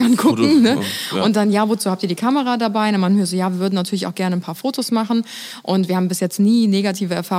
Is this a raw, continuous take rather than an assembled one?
yes; 0 cuts

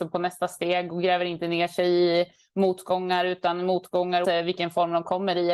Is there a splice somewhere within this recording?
yes; 1 cut; at 4.2 s

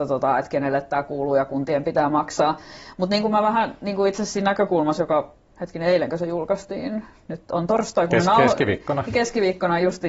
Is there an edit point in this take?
no; 0 cuts

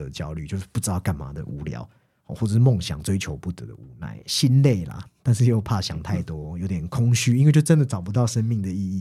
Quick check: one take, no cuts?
yes; 0 cuts

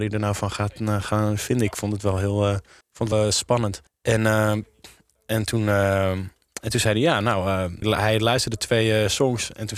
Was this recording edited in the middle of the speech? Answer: yes; 4 cuts; at 2.8 s, 3.1 s, 3.9 s, 7.8 s

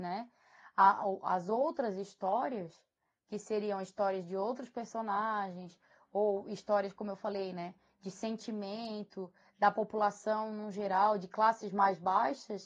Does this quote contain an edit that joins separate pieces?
no; 0 cuts

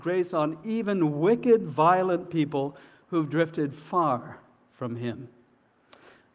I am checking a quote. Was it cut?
no; 0 cuts

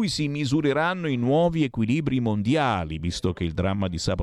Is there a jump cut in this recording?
no; 0 cuts

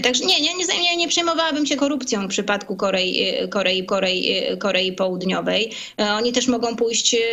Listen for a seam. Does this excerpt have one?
yes; 3 cuts; at 1.8 s, 2.3 s, 3.9 s

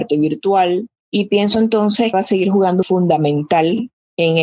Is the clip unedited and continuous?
no; 3 cuts; at 1.0 s, 2.1 s, 2.8 s

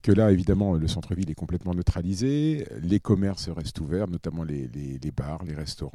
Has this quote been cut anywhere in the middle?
no; 0 cuts

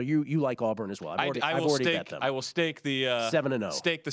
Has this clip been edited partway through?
no; 0 cuts

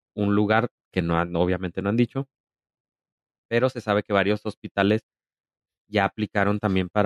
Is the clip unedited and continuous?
yes; 0 cuts

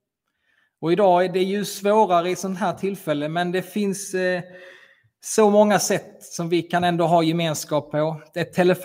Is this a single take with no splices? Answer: yes; 0 cuts

